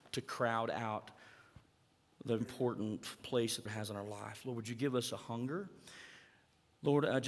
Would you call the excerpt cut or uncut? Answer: cut